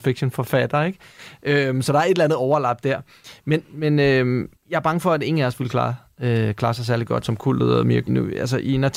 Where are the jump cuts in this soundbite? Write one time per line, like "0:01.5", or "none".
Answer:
0:03.6
0:04.5
0:07.2
0:08.1

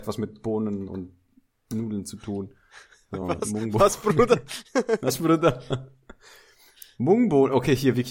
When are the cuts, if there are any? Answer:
none

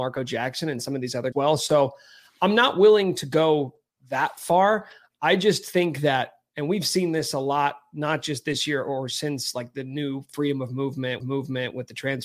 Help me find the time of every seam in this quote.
0:01.3
0:11.2

